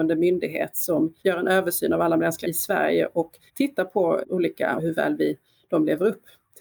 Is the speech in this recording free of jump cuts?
no; 5 cuts; at 1.2 s, 2.4 s, 3.5 s, 4.2 s, 4.8 s

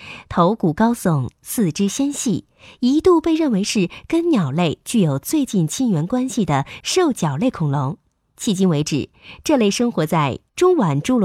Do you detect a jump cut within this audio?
no; 0 cuts

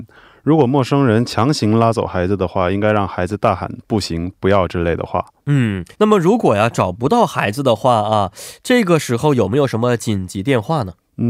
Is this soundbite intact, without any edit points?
no; 1 cut; at 5.9 s

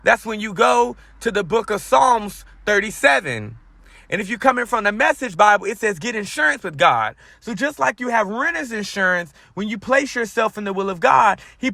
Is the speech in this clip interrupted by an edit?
no; 0 cuts

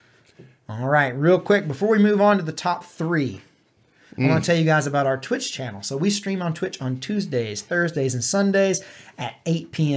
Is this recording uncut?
yes; 0 cuts

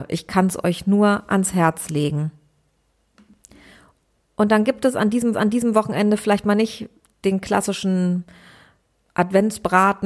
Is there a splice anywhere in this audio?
yes; 1 cut; at 5.3 s

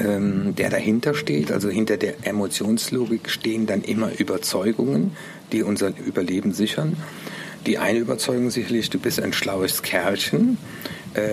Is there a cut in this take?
no; 0 cuts

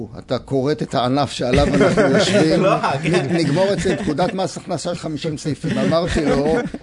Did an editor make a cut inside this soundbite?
yes; 1 cut; at 5.0 s

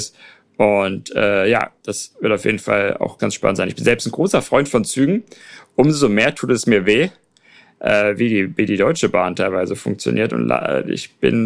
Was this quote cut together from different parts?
yes; 1 cut; at 3.2 s

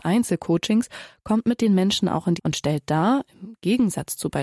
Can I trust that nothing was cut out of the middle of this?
no; 1 cut; at 2.4 s

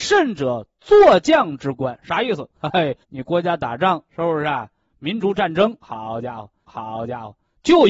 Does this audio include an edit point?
yes; 4 cuts; at 2.5 s, 3.0 s, 4.1 s, 6.6 s

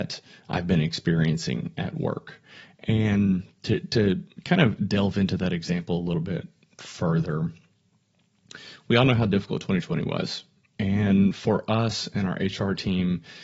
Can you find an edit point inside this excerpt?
no; 0 cuts

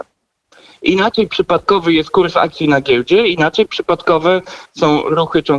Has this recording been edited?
no; 0 cuts

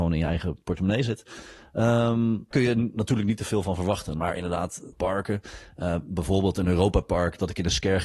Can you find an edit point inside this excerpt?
yes; 2 cuts; at 2.5 s, 4.9 s

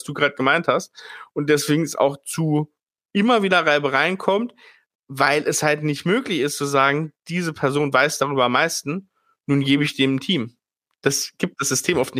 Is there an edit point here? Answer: no; 0 cuts

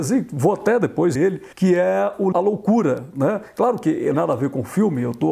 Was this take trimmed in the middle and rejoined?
yes; 4 cuts; at 1.1 s, 1.5 s, 2.3 s, 4.1 s

